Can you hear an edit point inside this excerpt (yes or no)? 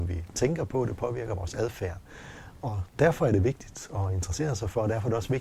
no